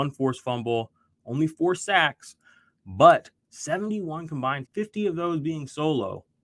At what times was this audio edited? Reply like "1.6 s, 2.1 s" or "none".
4.6 s